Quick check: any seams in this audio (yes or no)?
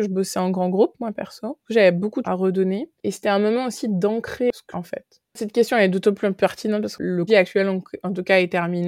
yes